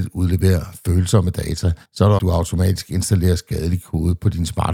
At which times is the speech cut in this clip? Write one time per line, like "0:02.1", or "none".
0:01.9
0:02.2